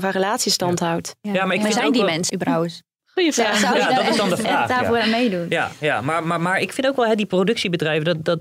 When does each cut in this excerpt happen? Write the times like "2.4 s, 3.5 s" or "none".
2.3 s